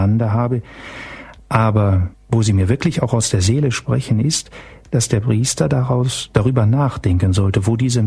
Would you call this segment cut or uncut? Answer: cut